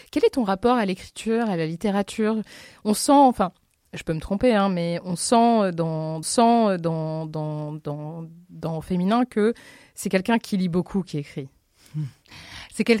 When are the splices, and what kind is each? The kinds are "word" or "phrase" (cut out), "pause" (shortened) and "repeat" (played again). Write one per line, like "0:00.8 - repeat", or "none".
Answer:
0:06.2 - repeat